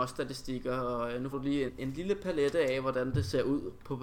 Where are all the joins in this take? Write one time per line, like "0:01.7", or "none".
0:01.3
0:01.7